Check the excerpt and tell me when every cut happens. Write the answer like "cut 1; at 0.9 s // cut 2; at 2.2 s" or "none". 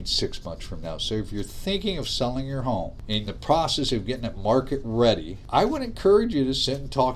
cut 1; at 3.3 s